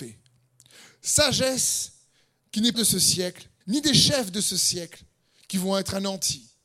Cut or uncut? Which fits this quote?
cut